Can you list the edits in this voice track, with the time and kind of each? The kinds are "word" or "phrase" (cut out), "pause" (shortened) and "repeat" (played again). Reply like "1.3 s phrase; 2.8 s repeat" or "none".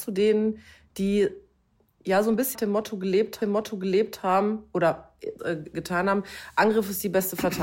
2.5 s word; 3.4 s repeat; 5.4 s phrase